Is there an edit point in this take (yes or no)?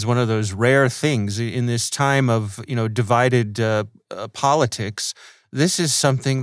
no